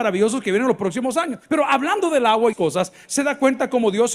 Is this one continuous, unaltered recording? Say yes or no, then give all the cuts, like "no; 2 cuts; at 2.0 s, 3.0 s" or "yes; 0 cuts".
no; 2 cuts; at 1.4 s, 2.5 s